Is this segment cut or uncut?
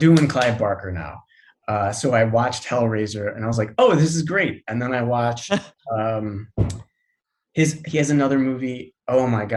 uncut